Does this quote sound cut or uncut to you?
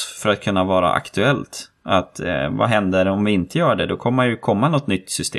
uncut